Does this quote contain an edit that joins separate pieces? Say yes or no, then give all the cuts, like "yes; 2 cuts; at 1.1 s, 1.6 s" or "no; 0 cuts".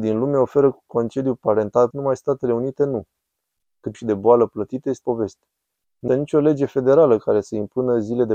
yes; 4 cuts; at 1.9 s, 3.9 s, 5.0 s, 6.1 s